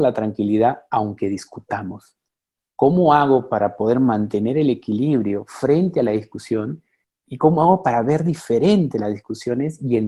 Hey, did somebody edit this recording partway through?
no; 0 cuts

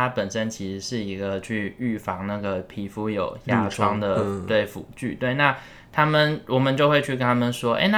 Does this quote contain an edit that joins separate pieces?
no; 0 cuts

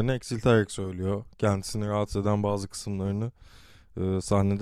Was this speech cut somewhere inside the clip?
no; 0 cuts

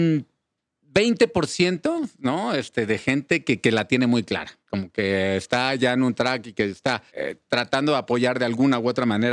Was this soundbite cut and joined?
yes; 2 cuts; at 4.6 s, 7.1 s

